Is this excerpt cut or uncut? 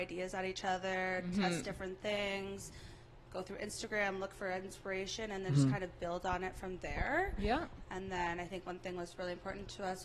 uncut